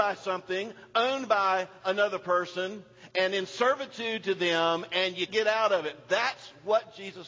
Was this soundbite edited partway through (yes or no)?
yes